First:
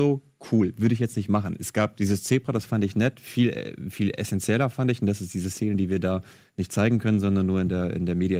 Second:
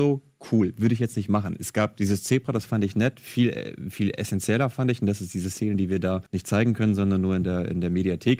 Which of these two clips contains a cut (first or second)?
second